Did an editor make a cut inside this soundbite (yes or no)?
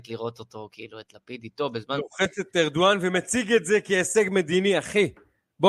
no